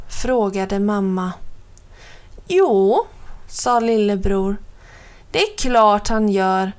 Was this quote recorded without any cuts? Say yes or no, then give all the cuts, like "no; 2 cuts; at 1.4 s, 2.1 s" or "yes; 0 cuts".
yes; 0 cuts